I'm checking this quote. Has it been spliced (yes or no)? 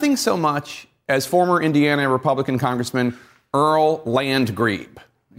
no